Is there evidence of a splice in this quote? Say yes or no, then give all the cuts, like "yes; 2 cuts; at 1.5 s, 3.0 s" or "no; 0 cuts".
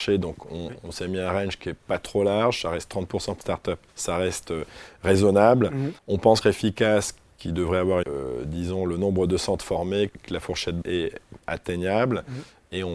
yes; 8 cuts; at 3.4 s, 3.9 s, 6.0 s, 6.4 s, 8.0 s, 10.1 s, 10.8 s, 11.4 s